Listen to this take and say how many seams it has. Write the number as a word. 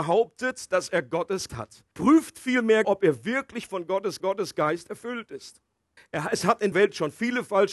six